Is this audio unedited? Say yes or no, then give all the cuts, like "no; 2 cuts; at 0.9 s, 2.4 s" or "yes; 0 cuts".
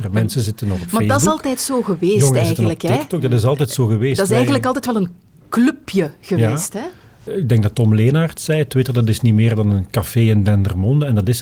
yes; 0 cuts